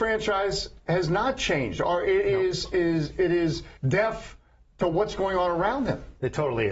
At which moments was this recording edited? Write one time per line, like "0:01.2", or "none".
0:03.8